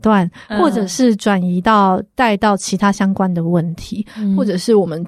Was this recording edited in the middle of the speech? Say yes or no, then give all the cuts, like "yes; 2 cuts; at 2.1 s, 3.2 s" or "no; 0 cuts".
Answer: no; 0 cuts